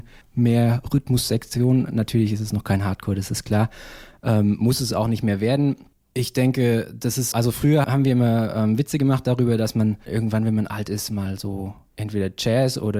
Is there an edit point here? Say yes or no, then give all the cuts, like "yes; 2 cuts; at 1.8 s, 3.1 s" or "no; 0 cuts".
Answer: yes; 2 cuts; at 7.3 s, 7.8 s